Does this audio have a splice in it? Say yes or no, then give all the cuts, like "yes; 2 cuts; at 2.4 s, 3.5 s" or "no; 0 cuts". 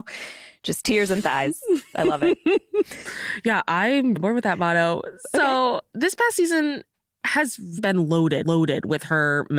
yes; 3 cuts; at 4.2 s, 7.8 s, 8.4 s